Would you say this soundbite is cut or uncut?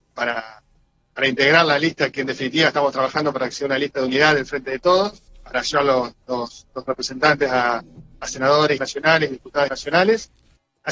cut